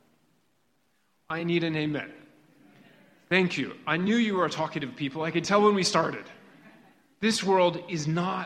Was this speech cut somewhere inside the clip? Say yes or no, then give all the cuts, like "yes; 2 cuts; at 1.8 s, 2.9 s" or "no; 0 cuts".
no; 0 cuts